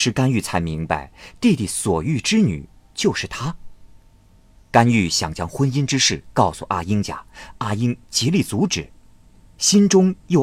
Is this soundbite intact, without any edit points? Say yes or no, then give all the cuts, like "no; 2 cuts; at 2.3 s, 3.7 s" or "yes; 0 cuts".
yes; 0 cuts